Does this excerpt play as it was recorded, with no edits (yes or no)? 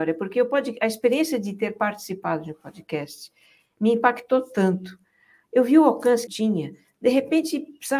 no